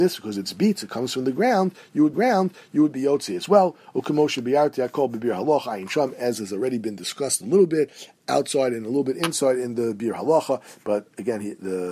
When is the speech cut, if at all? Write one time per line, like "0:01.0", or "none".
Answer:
0:02.1
0:08.2